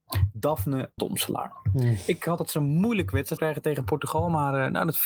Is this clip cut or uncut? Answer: cut